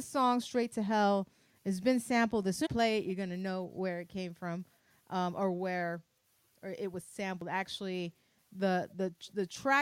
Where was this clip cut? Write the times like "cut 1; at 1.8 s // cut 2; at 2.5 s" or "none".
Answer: cut 1; at 2.6 s